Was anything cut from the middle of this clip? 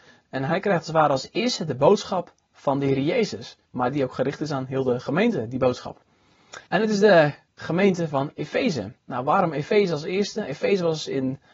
yes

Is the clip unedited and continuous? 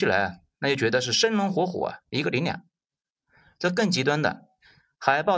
yes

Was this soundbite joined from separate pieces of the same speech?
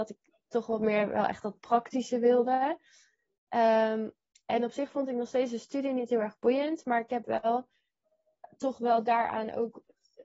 no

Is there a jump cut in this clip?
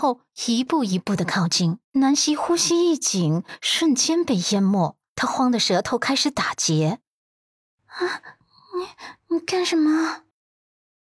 yes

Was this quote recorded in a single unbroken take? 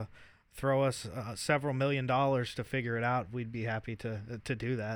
yes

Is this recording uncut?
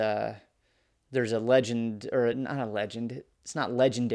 yes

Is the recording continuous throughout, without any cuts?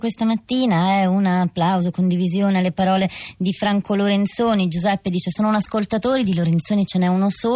yes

